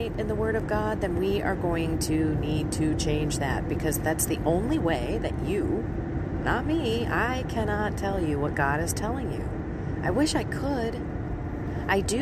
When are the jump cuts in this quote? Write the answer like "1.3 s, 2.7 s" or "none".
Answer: none